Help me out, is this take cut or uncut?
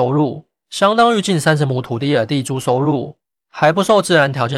uncut